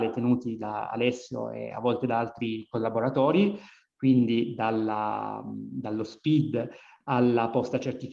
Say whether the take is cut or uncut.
uncut